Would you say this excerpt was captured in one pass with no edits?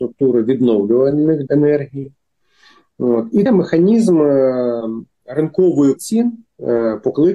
no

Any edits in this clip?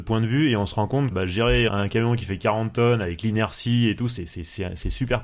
yes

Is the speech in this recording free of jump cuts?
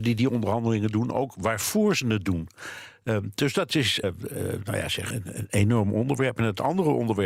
no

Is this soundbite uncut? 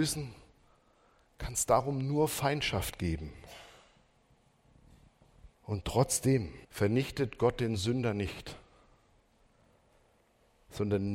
no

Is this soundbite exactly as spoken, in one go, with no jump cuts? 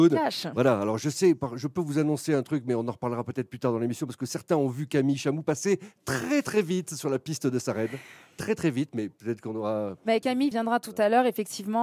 yes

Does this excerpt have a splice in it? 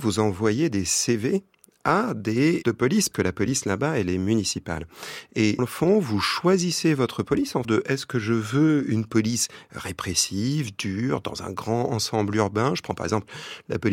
yes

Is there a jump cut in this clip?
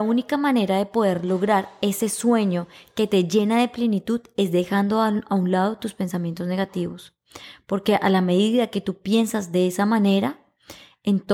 no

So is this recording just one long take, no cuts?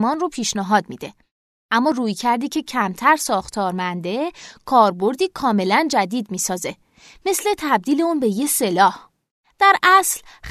yes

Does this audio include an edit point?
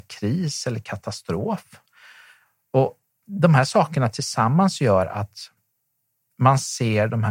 no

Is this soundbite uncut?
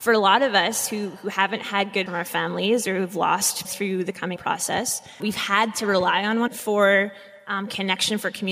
no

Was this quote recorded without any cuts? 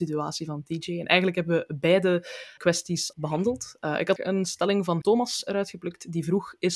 no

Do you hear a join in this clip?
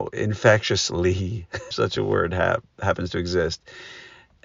yes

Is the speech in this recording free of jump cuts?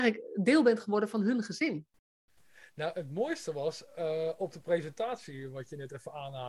yes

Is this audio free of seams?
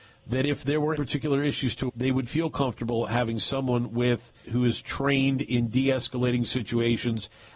no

